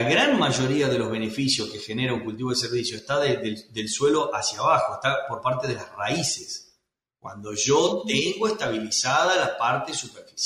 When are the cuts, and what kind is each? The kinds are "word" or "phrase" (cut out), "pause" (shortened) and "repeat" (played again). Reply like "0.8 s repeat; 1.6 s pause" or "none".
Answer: none